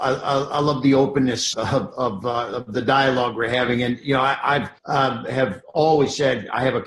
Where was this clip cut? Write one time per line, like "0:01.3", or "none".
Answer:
0:01.5
0:04.8